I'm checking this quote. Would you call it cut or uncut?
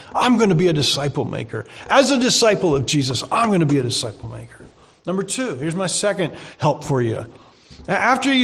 uncut